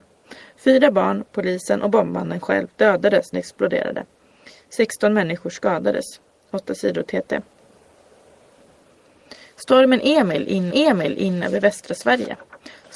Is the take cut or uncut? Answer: cut